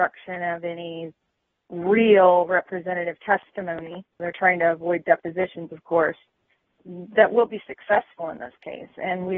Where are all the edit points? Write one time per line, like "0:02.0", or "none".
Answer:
0:01.6
0:04.2